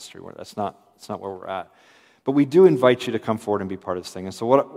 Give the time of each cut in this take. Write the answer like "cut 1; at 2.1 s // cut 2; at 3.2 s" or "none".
none